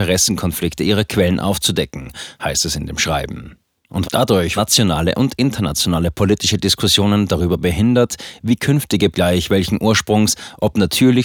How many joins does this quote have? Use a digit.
3